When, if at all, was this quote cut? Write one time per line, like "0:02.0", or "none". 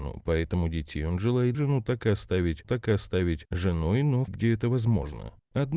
0:01.5
0:02.6
0:04.3